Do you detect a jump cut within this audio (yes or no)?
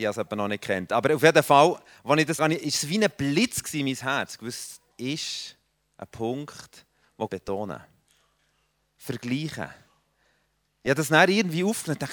yes